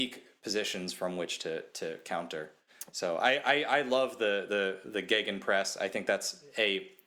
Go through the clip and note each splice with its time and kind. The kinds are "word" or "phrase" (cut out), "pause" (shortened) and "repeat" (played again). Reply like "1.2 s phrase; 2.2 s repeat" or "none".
none